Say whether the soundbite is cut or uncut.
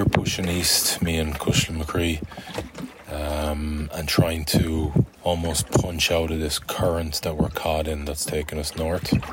cut